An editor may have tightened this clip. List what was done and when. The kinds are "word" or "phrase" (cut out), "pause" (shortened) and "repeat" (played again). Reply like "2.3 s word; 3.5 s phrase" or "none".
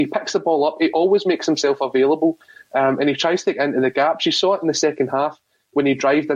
none